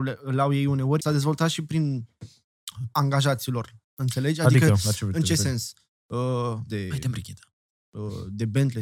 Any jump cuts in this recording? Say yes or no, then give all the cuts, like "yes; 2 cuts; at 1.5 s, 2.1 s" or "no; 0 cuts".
yes; 4 cuts; at 1.0 s, 2.9 s, 3.8 s, 6.7 s